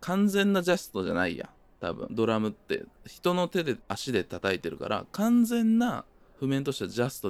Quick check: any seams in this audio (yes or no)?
yes